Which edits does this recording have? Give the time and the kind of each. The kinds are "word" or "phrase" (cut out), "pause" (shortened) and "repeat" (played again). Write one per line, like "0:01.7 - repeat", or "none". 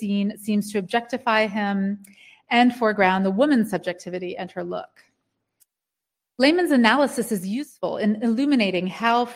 none